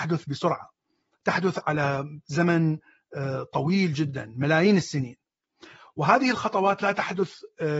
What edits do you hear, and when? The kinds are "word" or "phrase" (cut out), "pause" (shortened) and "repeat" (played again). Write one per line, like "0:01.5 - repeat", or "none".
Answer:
none